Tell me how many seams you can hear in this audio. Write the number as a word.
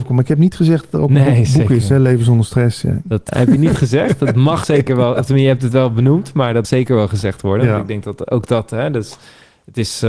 three